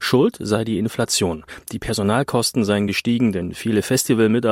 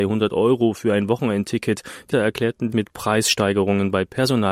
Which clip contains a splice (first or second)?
second